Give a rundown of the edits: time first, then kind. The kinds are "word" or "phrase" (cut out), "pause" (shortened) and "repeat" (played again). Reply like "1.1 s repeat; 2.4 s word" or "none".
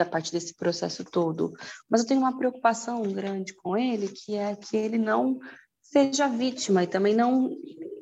none